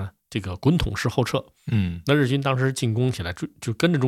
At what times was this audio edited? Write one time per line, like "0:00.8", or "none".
none